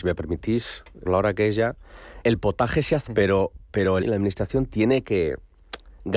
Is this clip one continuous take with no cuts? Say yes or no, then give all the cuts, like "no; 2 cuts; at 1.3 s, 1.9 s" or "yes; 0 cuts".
no; 4 cuts; at 1.0 s, 2.2 s, 3.1 s, 4.0 s